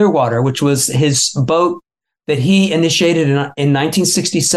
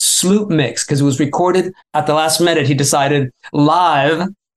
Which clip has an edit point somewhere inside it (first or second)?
second